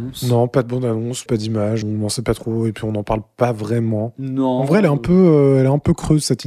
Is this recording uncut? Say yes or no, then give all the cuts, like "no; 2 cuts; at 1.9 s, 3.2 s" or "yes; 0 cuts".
no; 2 cuts; at 1.3 s, 1.8 s